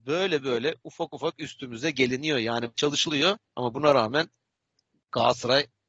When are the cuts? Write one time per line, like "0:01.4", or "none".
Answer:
0:02.7